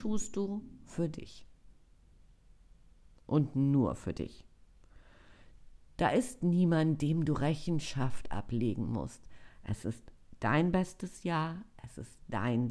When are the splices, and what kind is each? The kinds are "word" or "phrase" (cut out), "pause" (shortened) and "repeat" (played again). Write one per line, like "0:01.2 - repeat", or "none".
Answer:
none